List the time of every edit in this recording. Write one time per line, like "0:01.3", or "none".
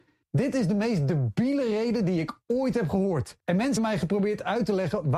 0:03.4
0:03.8